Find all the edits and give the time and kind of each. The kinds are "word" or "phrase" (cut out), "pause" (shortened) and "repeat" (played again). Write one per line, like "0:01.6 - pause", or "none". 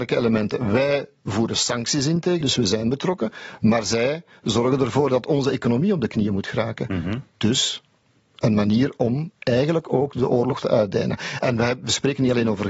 0:02.4 - word
0:10.6 - word